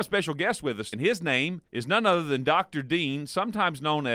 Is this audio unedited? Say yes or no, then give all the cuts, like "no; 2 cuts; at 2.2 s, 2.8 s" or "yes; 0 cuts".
no; 2 cuts; at 0.9 s, 1.7 s